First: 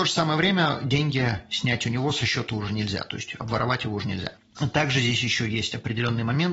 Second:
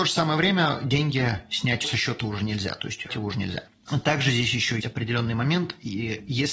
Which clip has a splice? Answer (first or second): second